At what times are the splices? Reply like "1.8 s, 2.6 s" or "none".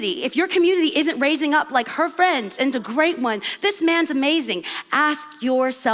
2.7 s